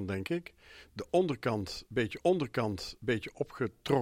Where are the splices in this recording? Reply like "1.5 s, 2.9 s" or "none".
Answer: 2.2 s